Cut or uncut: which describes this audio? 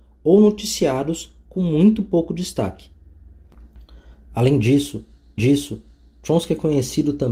cut